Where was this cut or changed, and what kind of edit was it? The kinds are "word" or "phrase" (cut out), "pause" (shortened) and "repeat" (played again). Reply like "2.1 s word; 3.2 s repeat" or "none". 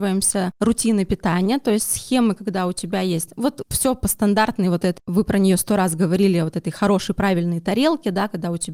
3.6 s word; 5.0 s word